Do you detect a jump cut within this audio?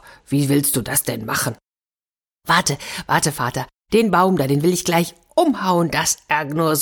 no; 0 cuts

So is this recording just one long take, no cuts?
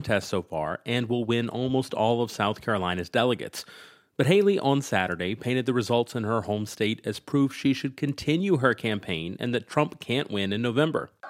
yes; 0 cuts

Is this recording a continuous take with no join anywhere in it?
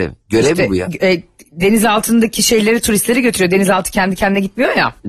yes; 0 cuts

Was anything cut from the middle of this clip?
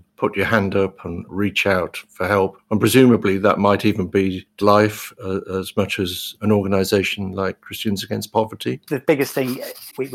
yes; 1 cut; at 4.6 s

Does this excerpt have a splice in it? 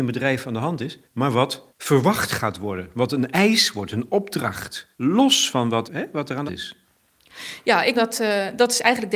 yes; 6 cuts; at 1.0 s, 1.7 s, 4.9 s, 5.8 s, 6.5 s, 7.9 s

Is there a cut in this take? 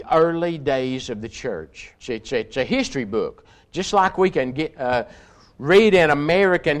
yes; 1 cut; at 2.0 s

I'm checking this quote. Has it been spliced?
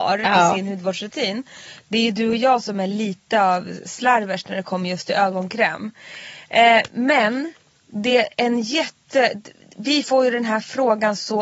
no; 0 cuts

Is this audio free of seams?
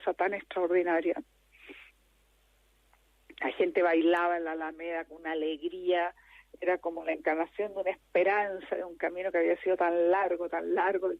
yes; 0 cuts

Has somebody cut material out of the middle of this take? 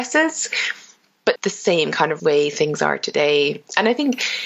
yes; 2 cuts; at 1.4 s, 2.2 s

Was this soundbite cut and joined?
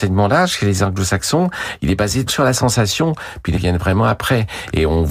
yes; 2 cuts; at 2.3 s, 3.5 s

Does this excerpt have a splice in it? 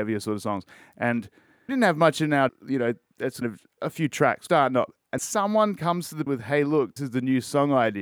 yes; 8 cuts; at 1.7 s, 2.5 s, 3.4 s, 3.8 s, 4.5 s, 5.2 s, 6.3 s, 7.0 s

